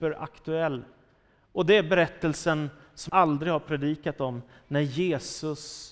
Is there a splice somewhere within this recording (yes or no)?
yes